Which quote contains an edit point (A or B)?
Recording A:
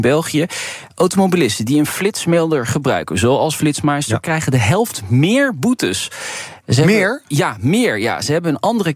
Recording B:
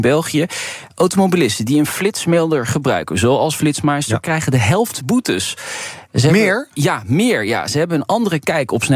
B